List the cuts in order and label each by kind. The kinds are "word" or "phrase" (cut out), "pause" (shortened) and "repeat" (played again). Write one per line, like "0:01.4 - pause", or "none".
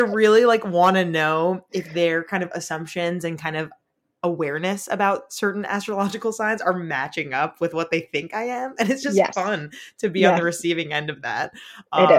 none